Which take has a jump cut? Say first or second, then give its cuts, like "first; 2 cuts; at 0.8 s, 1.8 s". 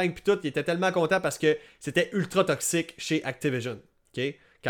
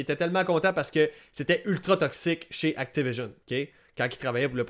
second; 1 cut; at 3.4 s